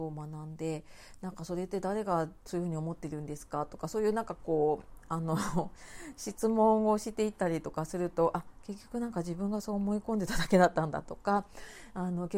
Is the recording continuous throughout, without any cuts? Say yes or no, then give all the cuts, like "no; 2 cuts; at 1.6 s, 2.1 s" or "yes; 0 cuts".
yes; 0 cuts